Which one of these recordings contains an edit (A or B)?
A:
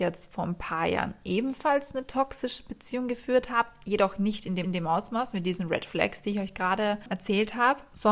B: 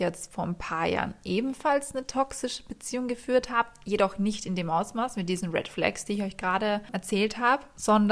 A